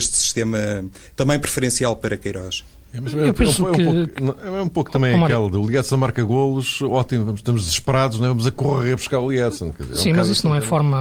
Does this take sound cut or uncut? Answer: uncut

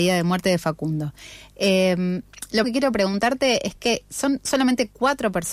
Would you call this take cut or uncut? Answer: cut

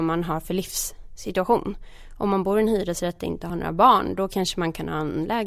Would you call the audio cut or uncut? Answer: uncut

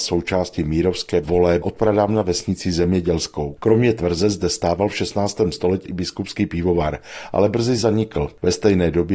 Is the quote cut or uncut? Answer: cut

